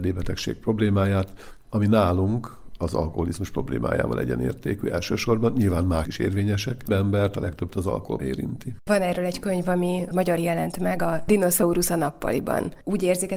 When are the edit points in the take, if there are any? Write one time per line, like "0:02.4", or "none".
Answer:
0:06.0
0:06.9
0:07.7
0:08.2
0:10.4